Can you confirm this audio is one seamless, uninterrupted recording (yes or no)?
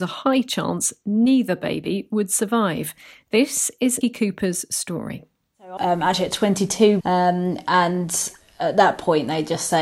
no